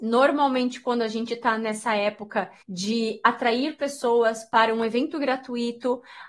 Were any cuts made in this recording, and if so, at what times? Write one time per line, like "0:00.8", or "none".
0:02.6